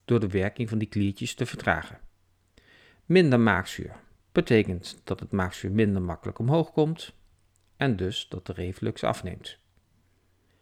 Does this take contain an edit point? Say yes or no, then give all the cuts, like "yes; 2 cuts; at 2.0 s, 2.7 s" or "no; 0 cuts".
no; 0 cuts